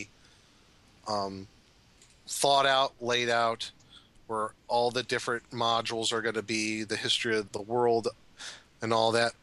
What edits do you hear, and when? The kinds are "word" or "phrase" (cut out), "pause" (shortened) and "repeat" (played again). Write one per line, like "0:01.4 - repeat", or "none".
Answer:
0:07.5 - word